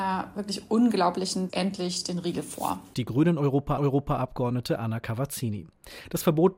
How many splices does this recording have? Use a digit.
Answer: 3